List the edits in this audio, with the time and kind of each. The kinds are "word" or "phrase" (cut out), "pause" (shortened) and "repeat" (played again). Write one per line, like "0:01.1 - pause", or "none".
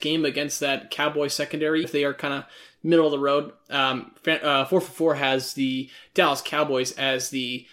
0:01.8 - word